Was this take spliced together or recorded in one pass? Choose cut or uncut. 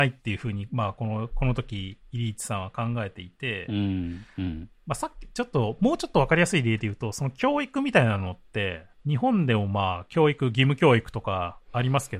cut